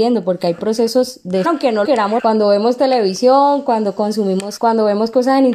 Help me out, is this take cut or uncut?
cut